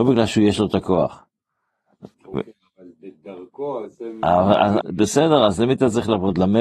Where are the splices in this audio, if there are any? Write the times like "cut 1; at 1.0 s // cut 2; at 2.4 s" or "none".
cut 1; at 2.1 s // cut 2; at 4.8 s